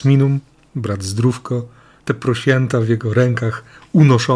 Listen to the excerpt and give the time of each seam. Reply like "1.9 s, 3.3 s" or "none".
none